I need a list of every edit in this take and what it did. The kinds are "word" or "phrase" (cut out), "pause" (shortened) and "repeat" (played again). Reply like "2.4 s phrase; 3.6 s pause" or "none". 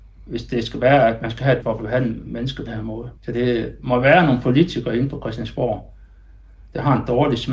1.6 s word; 2.7 s word; 3.2 s pause